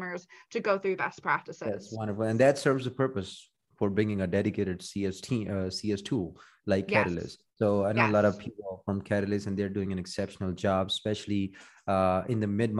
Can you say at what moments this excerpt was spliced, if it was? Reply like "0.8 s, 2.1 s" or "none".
7.5 s